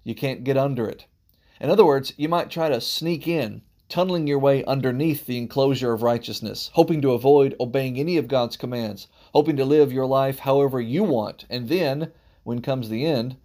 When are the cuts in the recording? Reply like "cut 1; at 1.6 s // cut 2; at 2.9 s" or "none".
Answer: none